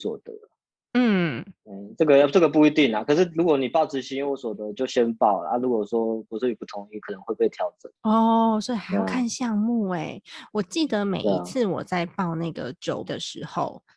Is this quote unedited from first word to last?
no; 2 cuts; at 8.0 s, 13.1 s

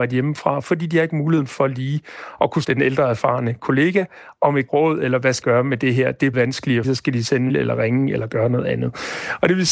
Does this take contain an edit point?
yes; 6 cuts; at 2.6 s, 4.7 s, 5.4 s, 6.3 s, 6.8 s, 7.5 s

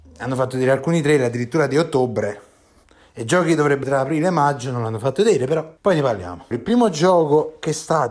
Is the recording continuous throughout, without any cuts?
no; 3 cuts; at 3.8 s, 5.8 s, 6.5 s

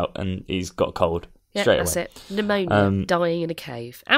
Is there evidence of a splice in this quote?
no; 0 cuts

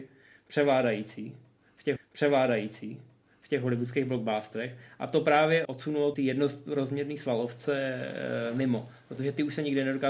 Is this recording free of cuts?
no; 3 cuts; at 2.0 s, 5.6 s, 6.1 s

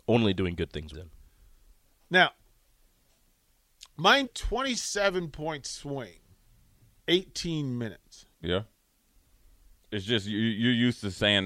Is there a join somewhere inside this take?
yes; 4 cuts; at 0.9 s, 4.3 s, 7.0 s, 8.3 s

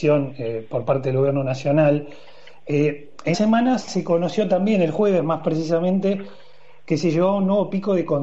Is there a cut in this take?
yes; 1 cut; at 3.3 s

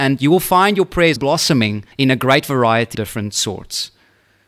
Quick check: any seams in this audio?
yes; 3 cuts; at 1.2 s, 1.9 s, 2.9 s

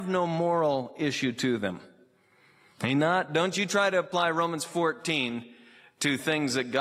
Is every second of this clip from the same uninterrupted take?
yes; 0 cuts

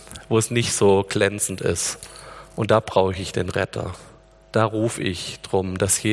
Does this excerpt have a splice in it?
no; 0 cuts

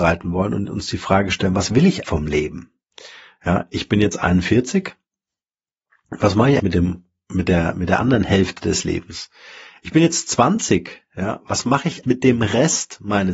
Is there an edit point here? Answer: yes; 3 cuts; at 2.0 s, 6.6 s, 12.0 s

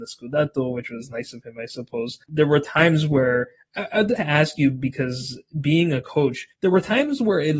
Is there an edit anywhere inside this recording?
yes; 3 cuts; at 2.2 s, 4.2 s, 6.5 s

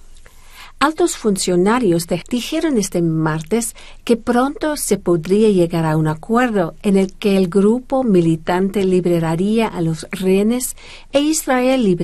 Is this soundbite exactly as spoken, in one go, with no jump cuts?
no; 1 cut; at 2.2 s

